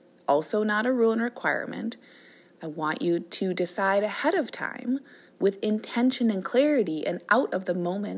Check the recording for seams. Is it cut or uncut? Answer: uncut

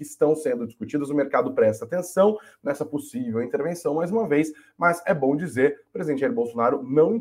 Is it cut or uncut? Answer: uncut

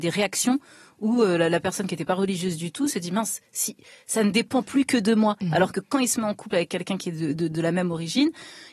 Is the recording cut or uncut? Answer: uncut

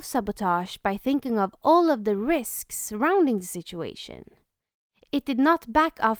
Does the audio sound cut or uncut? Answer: uncut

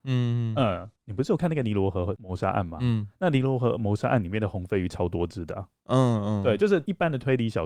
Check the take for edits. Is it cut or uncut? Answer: cut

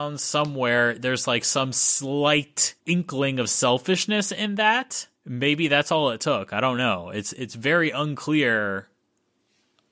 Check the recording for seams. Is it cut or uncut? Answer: cut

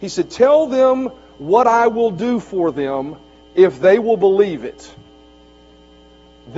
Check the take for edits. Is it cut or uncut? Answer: uncut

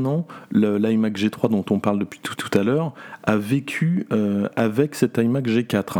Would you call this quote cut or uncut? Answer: cut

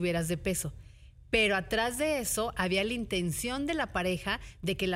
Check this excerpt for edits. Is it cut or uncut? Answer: uncut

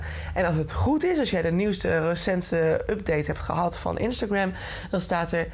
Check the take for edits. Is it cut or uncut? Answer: uncut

